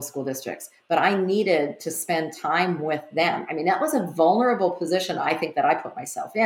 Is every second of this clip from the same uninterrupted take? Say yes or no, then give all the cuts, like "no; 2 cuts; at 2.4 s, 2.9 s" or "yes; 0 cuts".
yes; 0 cuts